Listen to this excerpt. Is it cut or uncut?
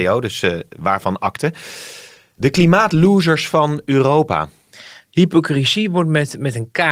uncut